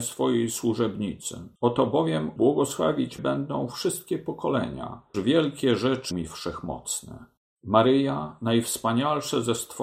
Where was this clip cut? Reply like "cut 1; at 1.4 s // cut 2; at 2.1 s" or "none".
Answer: cut 1; at 1.6 s // cut 2; at 2.4 s // cut 3; at 3.2 s // cut 4; at 5.1 s // cut 5; at 6.1 s // cut 6; at 7.4 s